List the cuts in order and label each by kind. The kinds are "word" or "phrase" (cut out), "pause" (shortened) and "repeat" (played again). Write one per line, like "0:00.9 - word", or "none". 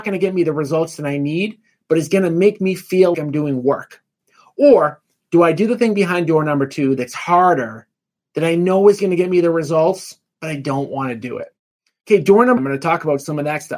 0:03.1 - word
0:12.6 - word